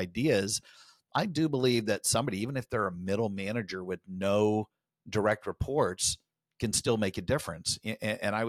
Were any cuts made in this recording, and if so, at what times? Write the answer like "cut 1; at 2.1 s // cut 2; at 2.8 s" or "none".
none